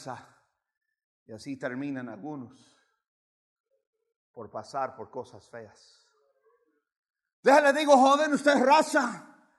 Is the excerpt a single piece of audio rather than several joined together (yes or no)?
yes